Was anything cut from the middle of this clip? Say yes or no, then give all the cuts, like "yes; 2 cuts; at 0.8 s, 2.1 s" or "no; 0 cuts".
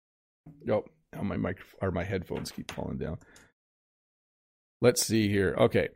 no; 0 cuts